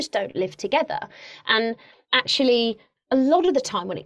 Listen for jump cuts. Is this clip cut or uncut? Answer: uncut